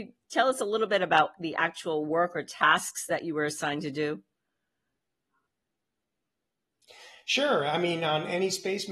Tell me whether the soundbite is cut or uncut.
uncut